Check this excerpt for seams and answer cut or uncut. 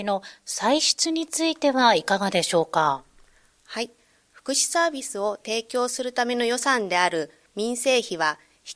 uncut